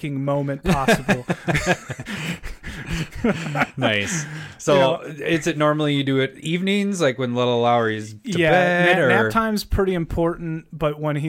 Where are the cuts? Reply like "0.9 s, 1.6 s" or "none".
none